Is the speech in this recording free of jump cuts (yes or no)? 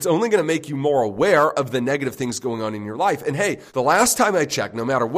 no